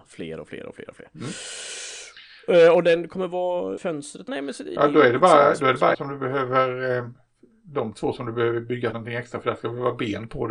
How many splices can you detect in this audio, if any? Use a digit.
4